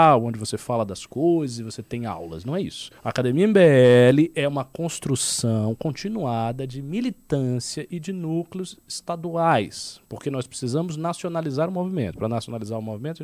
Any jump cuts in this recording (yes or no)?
yes